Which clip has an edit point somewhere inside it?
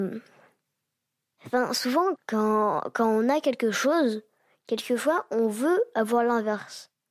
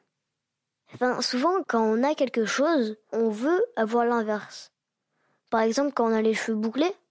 second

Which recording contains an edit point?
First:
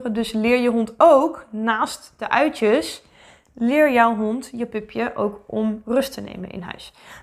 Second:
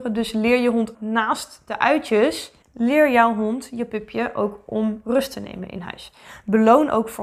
second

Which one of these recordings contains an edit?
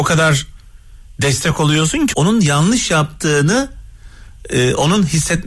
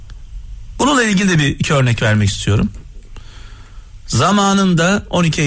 first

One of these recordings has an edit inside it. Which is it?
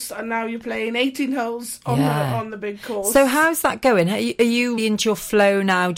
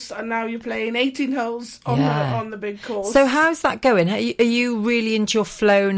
first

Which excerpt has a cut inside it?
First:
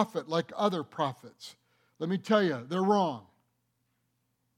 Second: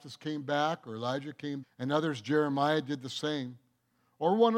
second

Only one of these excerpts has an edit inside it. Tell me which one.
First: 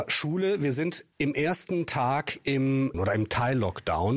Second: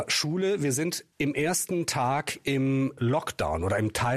first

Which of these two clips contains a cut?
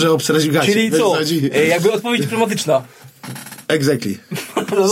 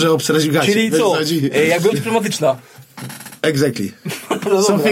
second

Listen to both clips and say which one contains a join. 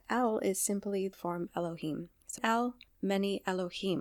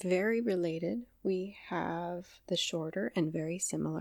first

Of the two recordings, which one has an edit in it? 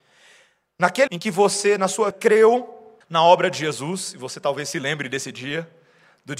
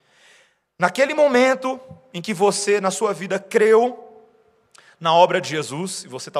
first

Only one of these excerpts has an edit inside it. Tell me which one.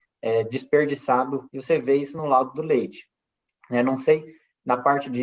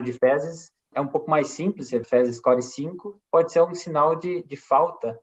second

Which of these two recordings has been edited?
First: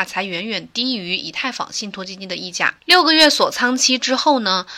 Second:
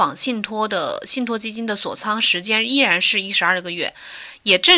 first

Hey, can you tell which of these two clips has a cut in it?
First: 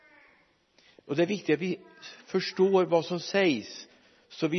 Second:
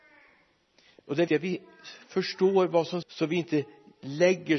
second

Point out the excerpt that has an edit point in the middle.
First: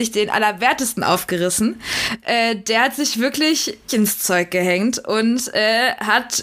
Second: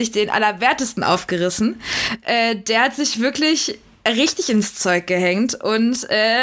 first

